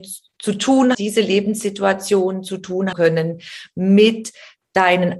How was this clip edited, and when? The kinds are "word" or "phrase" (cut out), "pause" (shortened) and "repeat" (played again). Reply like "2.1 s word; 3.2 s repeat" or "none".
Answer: 0.9 s word; 2.9 s word